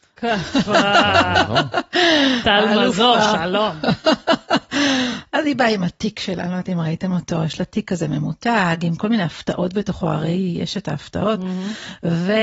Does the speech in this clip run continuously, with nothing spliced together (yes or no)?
yes